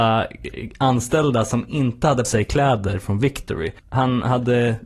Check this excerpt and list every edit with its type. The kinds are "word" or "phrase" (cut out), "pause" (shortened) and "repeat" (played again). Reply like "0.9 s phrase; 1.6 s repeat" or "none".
2.2 s word; 3.8 s pause